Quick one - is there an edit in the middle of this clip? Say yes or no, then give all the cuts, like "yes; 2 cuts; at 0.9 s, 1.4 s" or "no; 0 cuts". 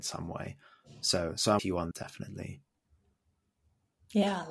yes; 2 cuts; at 1.6 s, 1.9 s